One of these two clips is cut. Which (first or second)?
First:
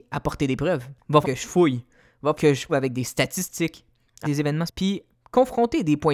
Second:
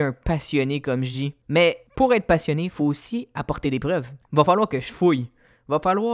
first